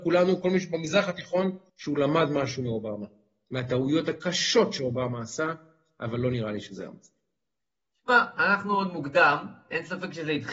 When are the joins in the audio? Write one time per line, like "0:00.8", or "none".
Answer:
0:01.7